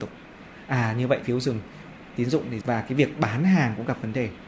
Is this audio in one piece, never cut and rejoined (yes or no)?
no